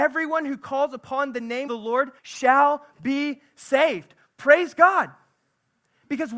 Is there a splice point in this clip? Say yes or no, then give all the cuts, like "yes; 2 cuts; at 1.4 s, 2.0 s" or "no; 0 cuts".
yes; 2 cuts; at 1.7 s, 2.2 s